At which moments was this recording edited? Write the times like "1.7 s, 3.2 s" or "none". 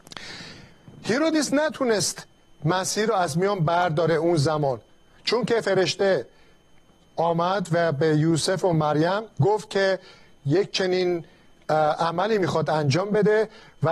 9.3 s